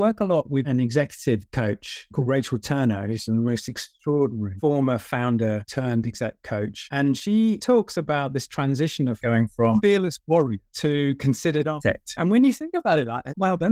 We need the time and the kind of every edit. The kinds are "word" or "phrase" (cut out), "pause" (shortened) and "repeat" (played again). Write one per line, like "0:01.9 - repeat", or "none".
none